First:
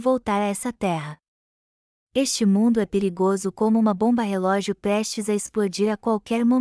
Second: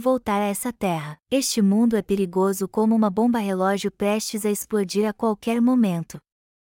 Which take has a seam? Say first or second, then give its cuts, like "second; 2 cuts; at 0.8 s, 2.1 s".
second; 1 cut; at 1.2 s